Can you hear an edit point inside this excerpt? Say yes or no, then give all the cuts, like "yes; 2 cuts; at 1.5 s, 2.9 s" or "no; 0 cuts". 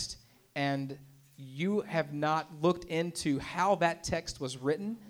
no; 0 cuts